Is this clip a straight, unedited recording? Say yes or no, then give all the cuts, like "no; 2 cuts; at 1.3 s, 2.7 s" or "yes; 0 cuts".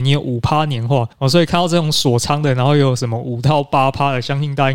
no; 1 cut; at 1.1 s